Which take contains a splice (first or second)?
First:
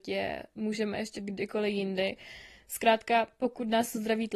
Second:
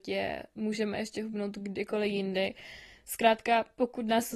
first